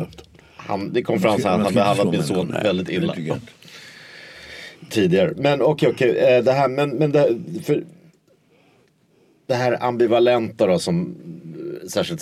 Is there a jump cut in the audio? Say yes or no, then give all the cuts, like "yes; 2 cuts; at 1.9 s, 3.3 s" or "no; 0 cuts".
no; 0 cuts